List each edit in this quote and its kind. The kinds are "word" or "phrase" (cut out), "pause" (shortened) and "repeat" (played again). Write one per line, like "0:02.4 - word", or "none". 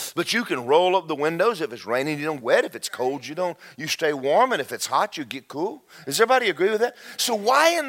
0:02.4 - word